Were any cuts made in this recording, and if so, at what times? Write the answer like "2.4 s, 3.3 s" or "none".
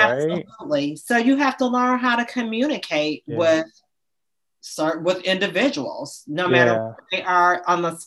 none